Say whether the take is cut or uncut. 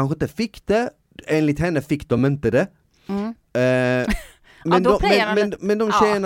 uncut